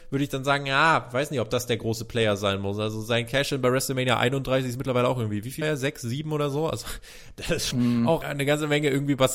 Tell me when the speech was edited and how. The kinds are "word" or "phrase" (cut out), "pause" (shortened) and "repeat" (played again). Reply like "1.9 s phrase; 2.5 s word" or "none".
5.6 s word; 7.7 s word; 8.2 s word